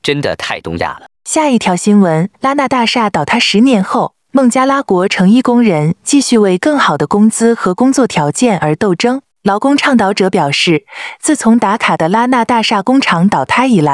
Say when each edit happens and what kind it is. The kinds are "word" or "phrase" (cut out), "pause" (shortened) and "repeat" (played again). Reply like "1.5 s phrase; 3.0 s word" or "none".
1.1 s pause; 2.3 s pause; 9.3 s pause